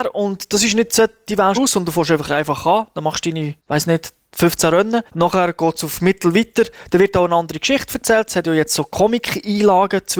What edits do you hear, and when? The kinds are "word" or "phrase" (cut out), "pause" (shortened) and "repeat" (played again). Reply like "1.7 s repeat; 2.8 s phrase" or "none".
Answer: 1.5 s phrase; 3.6 s pause; 5.1 s pause

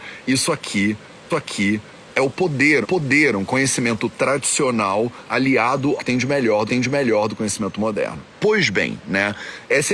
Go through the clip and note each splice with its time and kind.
1.3 s repeat; 2.8 s repeat; 6.0 s word; 6.7 s repeat; 8.3 s pause

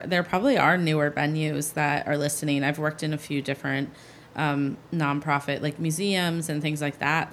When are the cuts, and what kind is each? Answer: none

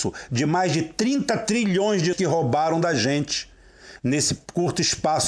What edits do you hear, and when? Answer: 2.1 s word

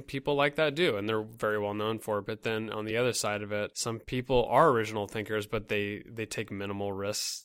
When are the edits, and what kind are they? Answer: none

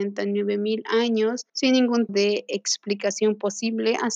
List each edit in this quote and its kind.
1.5 s pause; 2.1 s word

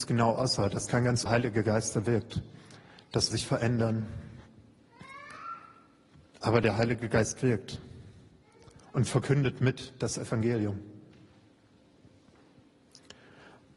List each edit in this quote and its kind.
1.3 s phrase; 3.3 s phrase

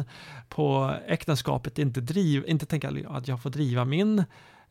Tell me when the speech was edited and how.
none

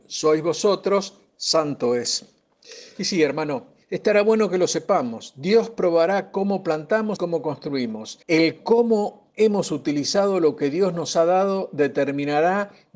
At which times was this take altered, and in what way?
3.8 s pause; 7.2 s word; 8.2 s pause

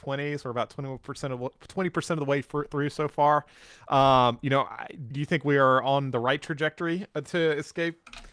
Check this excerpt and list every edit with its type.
5.1 s word

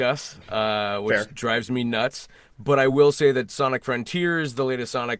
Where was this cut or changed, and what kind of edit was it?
none

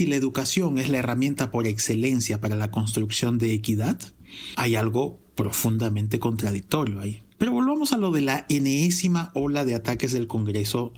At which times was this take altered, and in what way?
7.3 s pause

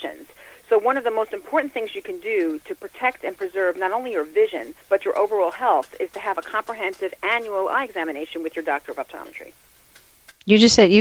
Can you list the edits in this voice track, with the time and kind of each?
4.8 s pause

